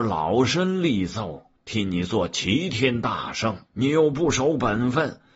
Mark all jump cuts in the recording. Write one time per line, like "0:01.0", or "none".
0:03.7